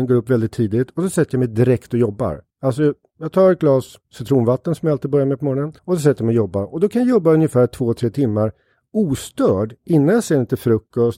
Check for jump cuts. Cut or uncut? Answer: cut